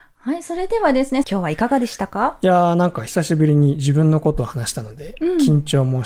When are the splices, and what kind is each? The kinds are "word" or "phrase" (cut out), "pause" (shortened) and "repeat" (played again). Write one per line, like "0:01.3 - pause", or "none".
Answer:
0:01.2 - phrase